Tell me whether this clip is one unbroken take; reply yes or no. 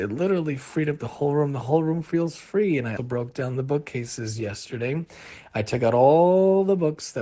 no